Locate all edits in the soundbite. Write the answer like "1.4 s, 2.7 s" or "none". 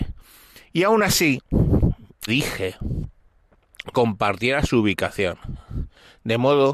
2.3 s, 3.9 s